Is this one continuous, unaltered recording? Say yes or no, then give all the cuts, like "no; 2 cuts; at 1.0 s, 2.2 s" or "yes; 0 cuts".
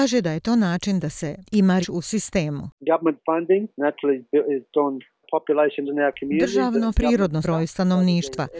no; 7 cuts; at 1.8 s, 3.7 s, 4.7 s, 5.2 s, 5.9 s, 6.9 s, 7.4 s